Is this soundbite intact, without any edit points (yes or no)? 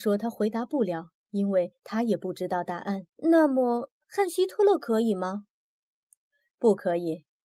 no